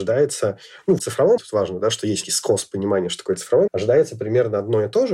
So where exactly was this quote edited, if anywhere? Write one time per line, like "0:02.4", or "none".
0:01.0
0:01.4
0:02.2
0:03.7